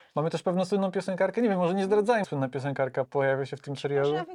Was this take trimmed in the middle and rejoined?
yes; 2 cuts; at 2.2 s, 3.1 s

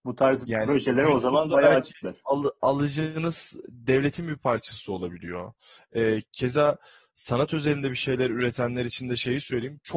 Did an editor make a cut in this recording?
no; 0 cuts

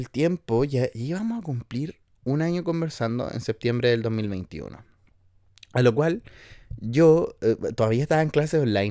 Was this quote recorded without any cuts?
yes; 0 cuts

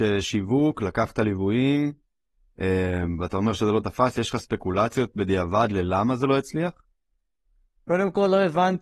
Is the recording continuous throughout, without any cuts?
yes; 0 cuts

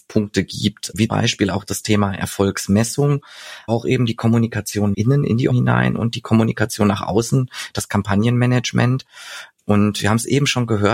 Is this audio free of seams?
no; 4 cuts; at 1.1 s, 3.7 s, 4.9 s, 5.5 s

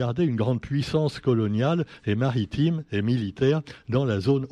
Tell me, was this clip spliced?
no; 0 cuts

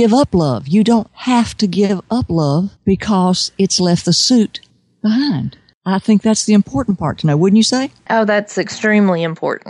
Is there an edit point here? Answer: no; 0 cuts

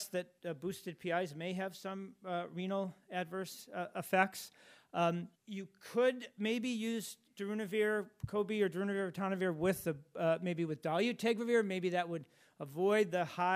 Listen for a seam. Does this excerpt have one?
yes; 1 cut; at 5.4 s

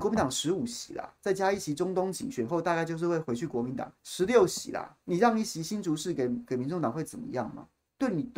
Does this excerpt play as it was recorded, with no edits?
no; 2 cuts; at 4.0 s, 5.0 s

